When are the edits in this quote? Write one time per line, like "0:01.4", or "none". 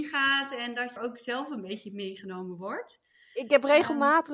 0:01.0